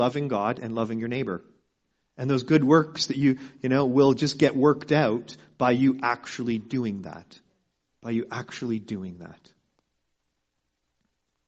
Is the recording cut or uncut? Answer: uncut